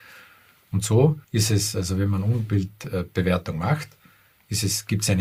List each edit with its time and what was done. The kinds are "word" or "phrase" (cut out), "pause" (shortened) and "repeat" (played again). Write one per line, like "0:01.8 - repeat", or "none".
0:01.2 - pause

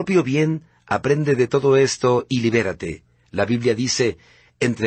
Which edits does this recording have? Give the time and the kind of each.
none

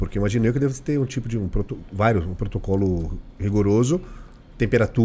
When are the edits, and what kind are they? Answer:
none

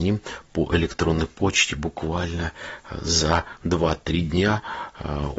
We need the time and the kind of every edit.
none

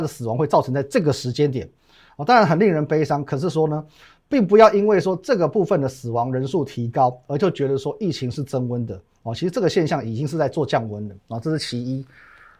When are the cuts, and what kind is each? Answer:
none

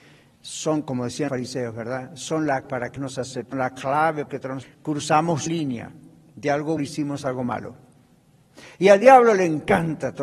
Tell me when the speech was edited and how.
0:01.3 - word
0:02.6 - word
0:03.0 - word
0:03.5 - word
0:04.3 - word
0:04.6 - word
0:05.5 - word
0:06.8 - word

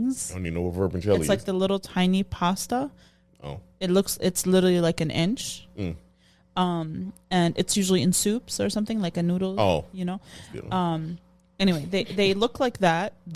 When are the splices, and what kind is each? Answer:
none

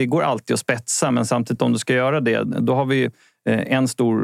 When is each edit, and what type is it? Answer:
none

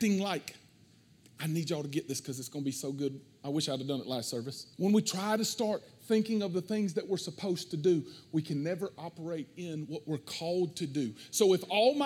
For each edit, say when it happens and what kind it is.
0:04.7 - pause

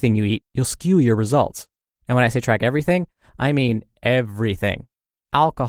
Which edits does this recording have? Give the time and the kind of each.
none

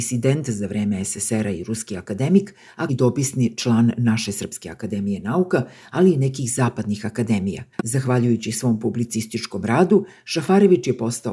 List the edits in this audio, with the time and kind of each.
0:02.9 - word
0:07.7 - pause

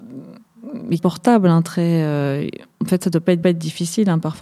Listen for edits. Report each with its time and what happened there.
0:01.0 - phrase
0:02.7 - pause
0:03.4 - repeat

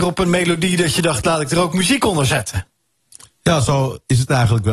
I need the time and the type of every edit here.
none

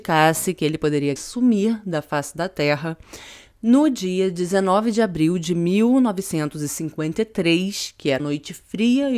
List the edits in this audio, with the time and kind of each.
0:01.2 - word
0:08.2 - word

